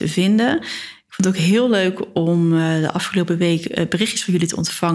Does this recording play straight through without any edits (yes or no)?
yes